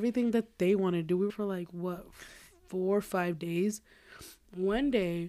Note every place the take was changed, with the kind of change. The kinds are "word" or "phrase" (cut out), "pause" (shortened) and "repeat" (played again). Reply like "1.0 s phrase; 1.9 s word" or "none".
1.3 s phrase

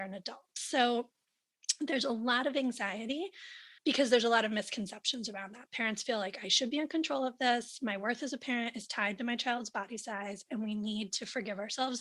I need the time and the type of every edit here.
3.8 s pause

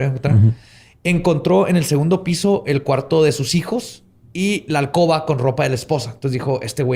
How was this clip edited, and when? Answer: none

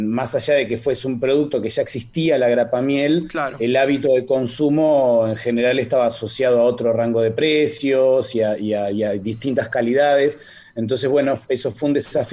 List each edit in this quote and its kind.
none

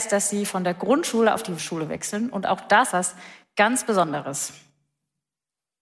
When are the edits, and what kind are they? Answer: 1.6 s word; 2.9 s word

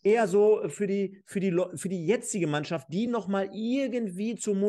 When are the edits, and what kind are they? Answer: none

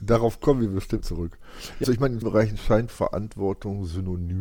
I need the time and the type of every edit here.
1.0 s word; 1.8 s word; 2.2 s word; 2.9 s word

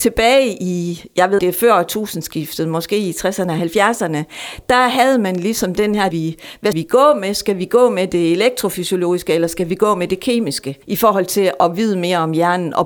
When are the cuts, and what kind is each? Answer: 1.4 s phrase; 6.1 s phrase; 6.7 s word; 10.8 s pause

